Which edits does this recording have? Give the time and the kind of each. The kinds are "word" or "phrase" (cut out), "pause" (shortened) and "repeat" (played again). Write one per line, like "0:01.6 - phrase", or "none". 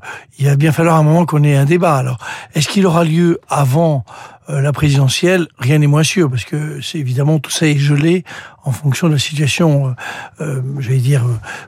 none

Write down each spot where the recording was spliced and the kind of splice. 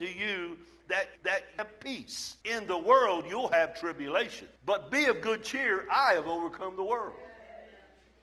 0:01.2 - repeat
0:02.4 - pause
0:04.6 - pause

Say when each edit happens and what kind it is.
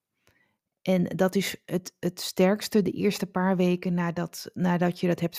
none

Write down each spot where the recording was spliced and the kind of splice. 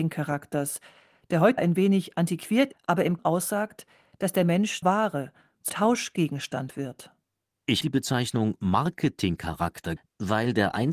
0:01.6 - word
0:02.7 - word
0:03.2 - word
0:04.8 - word
0:05.7 - word
0:07.8 - word
0:10.0 - word

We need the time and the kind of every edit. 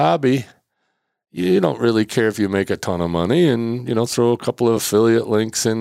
none

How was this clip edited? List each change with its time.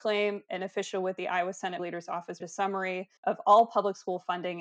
0:01.8 - word
0:02.4 - word
0:03.2 - pause

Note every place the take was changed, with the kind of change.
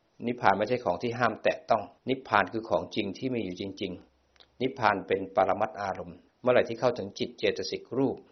0:02.0 - pause
0:04.1 - pause
0:06.3 - pause

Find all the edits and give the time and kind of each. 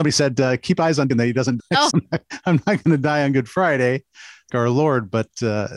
0:01.1 - word
0:01.6 - word
0:01.9 - word
0:04.5 - word

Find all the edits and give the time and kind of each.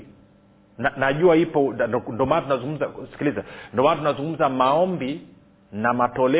none

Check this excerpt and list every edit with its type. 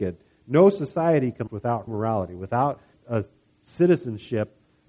0:01.5 - word
0:01.9 - word
0:02.9 - word

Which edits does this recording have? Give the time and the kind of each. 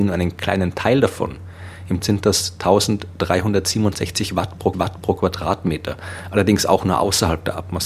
0:02.0 - word
0:04.7 - repeat

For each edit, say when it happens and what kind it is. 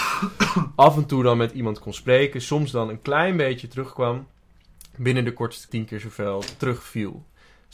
0:05.7 - word

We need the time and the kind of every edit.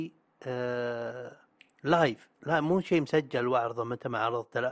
none

